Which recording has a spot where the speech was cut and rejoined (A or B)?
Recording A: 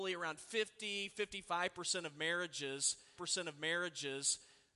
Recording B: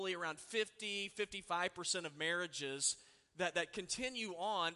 A